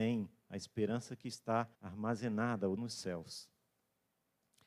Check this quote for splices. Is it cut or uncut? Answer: cut